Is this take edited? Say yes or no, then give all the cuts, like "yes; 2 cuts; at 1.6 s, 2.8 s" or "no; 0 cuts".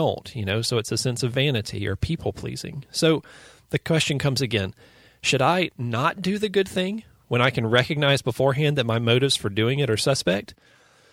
no; 0 cuts